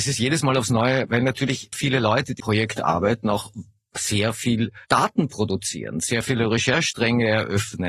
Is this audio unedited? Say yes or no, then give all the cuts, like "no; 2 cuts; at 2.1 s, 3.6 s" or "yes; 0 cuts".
no; 4 cuts; at 1.1 s, 1.7 s, 2.4 s, 4.8 s